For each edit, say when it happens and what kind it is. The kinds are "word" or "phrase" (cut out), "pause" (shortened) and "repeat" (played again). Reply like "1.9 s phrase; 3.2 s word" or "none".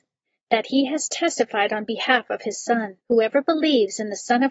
3.0 s pause